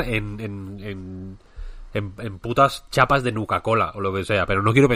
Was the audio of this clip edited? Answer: no; 0 cuts

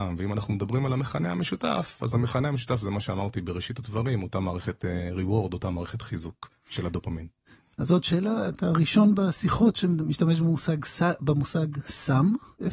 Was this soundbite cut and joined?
no; 0 cuts

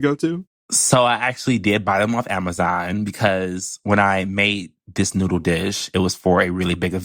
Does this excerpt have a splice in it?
no; 0 cuts

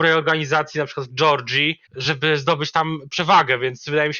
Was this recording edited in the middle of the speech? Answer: yes; 1 cut; at 1.9 s

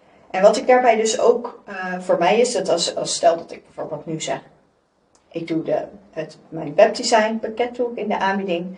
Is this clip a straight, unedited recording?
yes; 0 cuts

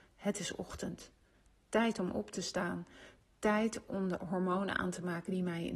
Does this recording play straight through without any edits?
yes; 0 cuts

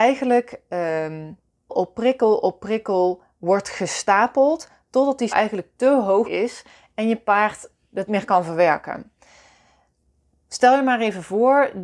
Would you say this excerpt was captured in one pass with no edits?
no; 4 cuts; at 1.7 s, 5.3 s, 6.2 s, 8.1 s

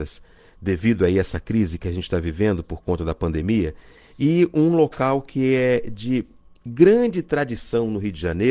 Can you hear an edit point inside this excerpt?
no; 0 cuts

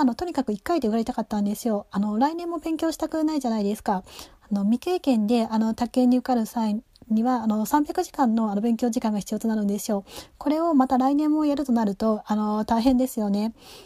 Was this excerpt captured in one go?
yes; 0 cuts

